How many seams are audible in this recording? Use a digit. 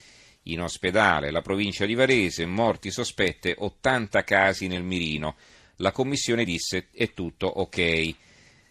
0